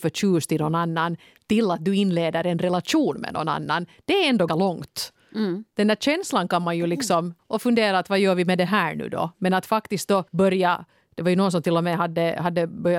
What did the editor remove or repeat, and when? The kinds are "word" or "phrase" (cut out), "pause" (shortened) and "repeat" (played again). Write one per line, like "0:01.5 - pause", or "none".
0:04.5 - word
0:07.4 - word
0:10.3 - pause